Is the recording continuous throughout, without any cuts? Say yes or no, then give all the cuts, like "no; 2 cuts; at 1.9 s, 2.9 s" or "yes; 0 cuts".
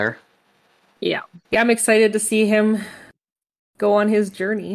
no; 1 cut; at 1.4 s